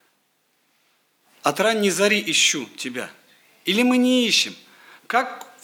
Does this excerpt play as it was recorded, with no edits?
yes; 0 cuts

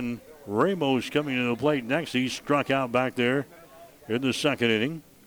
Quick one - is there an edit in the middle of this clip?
no; 0 cuts

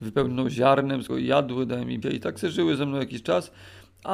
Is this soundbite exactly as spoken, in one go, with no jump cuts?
no; 2 cuts; at 1.1 s, 2.0 s

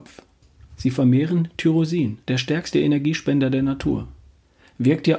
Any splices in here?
yes; 1 cut; at 2.2 s

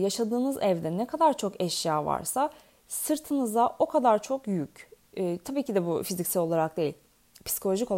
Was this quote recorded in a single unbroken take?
yes; 0 cuts

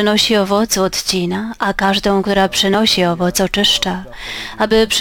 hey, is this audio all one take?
yes; 0 cuts

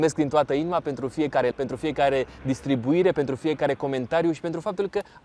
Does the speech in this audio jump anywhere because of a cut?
yes; 1 cut; at 1.5 s

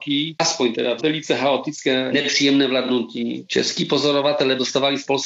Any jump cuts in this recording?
yes; 1 cut; at 1.0 s

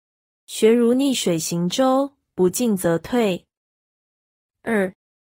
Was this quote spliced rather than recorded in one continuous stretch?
no; 0 cuts

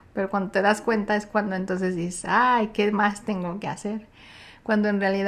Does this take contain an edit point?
no; 0 cuts

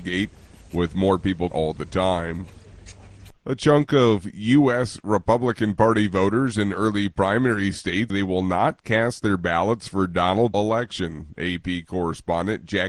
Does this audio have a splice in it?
yes; 4 cuts; at 1.5 s, 3.4 s, 8.1 s, 10.5 s

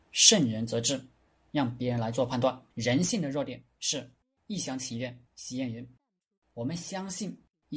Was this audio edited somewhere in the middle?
yes; 2 cuts; at 2.7 s, 5.3 s

